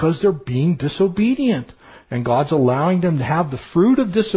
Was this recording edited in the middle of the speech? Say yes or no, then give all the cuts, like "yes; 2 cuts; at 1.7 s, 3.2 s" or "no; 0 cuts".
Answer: no; 0 cuts